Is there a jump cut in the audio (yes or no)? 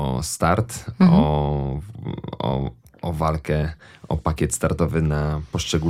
no